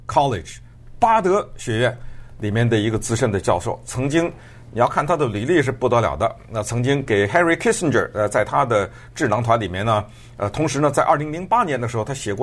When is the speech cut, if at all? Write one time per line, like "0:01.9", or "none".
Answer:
none